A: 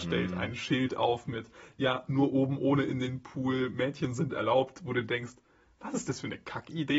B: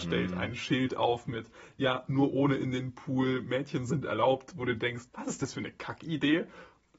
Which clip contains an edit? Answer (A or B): B